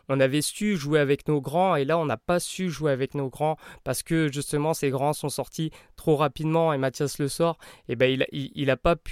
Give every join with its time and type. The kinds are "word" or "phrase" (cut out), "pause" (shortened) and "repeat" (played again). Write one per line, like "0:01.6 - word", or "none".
none